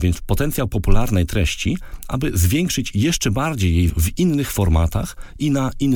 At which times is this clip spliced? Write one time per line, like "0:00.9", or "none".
0:03.9